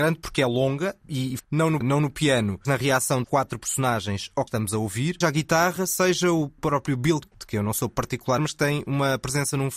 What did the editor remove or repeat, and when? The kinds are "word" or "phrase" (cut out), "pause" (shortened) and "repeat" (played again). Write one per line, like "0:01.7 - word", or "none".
0:01.4 - word
0:01.8 - word
0:02.6 - word
0:03.2 - word
0:04.5 - word
0:05.2 - word
0:07.2 - word
0:08.4 - word